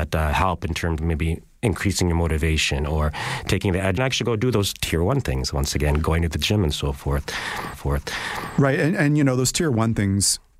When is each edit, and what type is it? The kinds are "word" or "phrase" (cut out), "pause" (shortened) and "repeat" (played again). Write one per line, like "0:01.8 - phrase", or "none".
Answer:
0:01.0 - word
0:04.0 - phrase
0:07.7 - repeat